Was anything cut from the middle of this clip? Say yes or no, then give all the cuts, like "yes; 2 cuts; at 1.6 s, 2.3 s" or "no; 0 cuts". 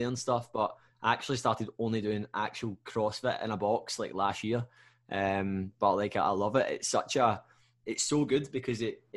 no; 0 cuts